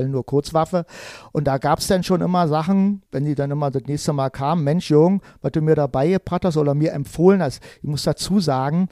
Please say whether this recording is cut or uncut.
cut